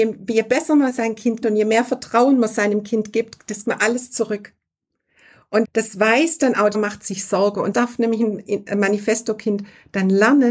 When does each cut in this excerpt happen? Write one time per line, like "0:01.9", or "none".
0:01.4
0:03.6
0:05.6
0:06.7
0:07.7

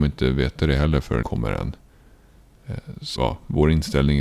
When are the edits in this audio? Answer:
0:01.2
0:03.2

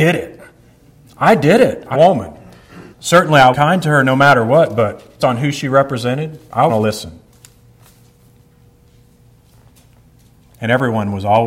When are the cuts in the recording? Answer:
0:01.9
0:02.9
0:03.5
0:05.2
0:06.7

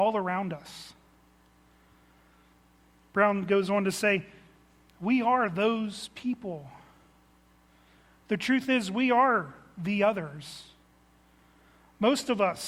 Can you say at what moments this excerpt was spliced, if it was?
none

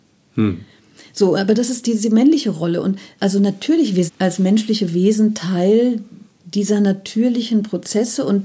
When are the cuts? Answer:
0:03.2
0:04.1

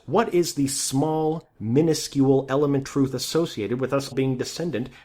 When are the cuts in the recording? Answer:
0:02.8
0:04.1

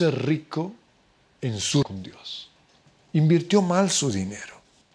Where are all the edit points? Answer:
0:01.8

